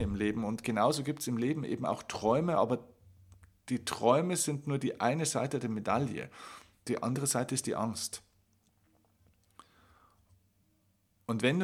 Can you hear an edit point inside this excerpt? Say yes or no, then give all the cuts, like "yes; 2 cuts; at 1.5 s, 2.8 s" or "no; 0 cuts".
no; 0 cuts